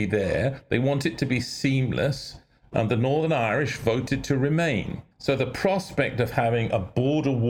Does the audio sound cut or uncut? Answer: cut